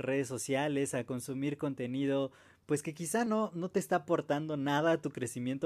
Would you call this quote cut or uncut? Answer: uncut